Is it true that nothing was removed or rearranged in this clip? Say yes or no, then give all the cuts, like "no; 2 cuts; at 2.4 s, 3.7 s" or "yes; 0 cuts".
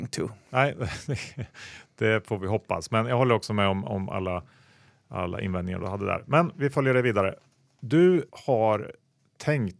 no; 1 cut; at 8.3 s